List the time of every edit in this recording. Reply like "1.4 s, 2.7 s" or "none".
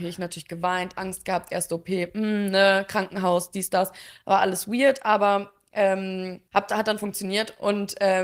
6.5 s

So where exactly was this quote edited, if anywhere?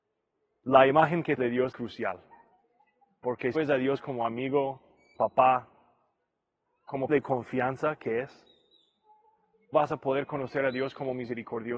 1.4 s, 1.7 s, 3.5 s, 5.1 s, 7.1 s, 9.7 s

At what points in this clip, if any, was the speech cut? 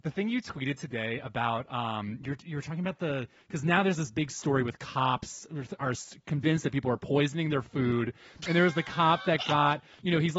none

